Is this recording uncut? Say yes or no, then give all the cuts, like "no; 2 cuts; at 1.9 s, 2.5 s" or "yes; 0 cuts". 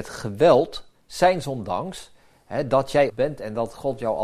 no; 1 cut; at 3.1 s